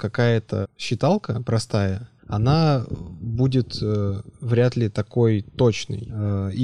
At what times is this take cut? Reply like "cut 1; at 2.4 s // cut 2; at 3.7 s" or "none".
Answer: cut 1; at 2.2 s

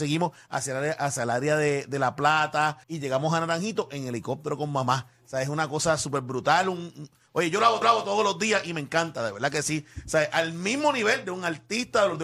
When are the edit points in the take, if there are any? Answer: cut 1; at 2.8 s // cut 2; at 7.8 s

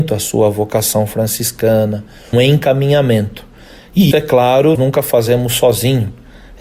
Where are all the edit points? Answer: cut 1; at 2.3 s // cut 2; at 4.1 s // cut 3; at 4.7 s

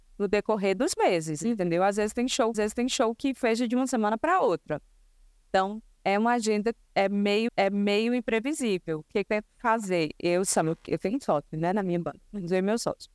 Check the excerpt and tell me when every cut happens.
cut 1; at 2.5 s // cut 2; at 5.9 s // cut 3; at 7.5 s // cut 4; at 9.2 s // cut 5; at 10.9 s

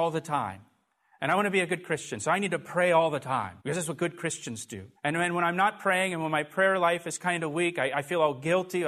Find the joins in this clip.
cut 1; at 3.6 s // cut 2; at 5.0 s

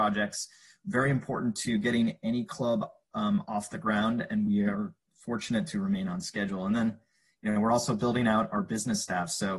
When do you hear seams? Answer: none

